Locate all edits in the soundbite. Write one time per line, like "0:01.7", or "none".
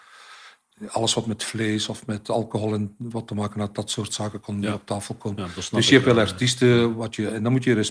none